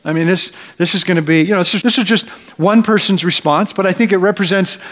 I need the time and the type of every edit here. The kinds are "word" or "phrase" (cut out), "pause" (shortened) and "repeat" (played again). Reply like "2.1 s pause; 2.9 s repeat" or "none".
1.8 s word